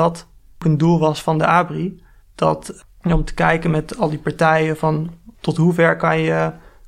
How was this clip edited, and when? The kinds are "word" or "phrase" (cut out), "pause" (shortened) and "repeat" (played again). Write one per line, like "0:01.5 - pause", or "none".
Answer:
0:02.2 - pause
0:05.3 - pause